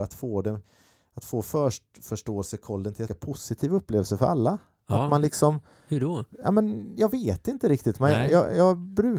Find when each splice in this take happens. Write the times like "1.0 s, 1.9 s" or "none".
3.1 s